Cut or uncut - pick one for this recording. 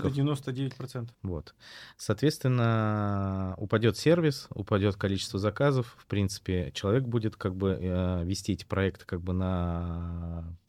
cut